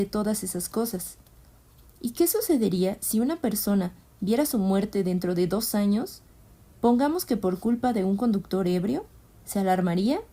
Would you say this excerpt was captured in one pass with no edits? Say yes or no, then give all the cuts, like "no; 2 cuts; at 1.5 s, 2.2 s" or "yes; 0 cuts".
yes; 0 cuts